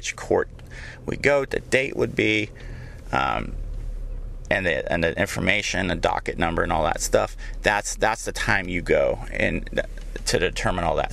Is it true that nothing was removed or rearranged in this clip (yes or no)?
no